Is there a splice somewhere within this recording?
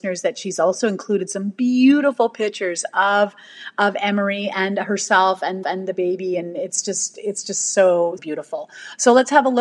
yes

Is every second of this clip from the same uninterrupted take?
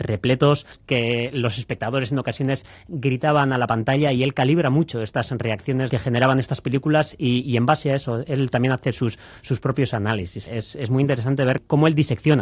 yes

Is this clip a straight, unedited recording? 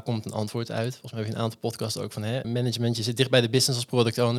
no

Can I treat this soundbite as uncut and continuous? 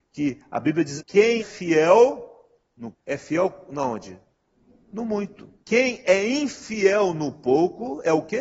no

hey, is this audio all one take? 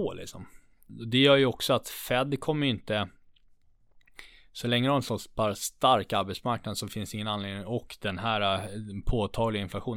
yes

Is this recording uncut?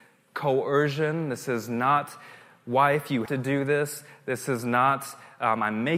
no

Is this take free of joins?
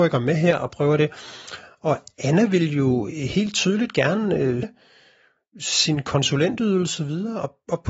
no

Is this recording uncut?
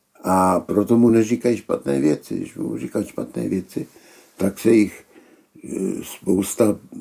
yes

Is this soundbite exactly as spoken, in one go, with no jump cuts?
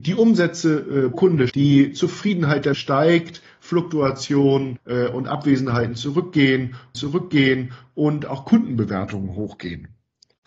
no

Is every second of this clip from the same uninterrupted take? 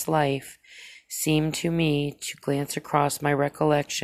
yes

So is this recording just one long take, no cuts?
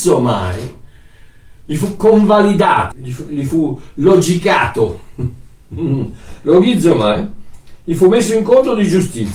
no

